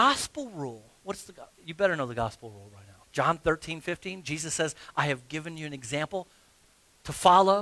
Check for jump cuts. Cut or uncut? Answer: cut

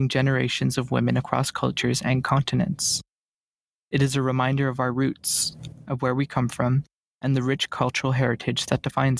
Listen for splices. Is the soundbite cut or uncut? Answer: uncut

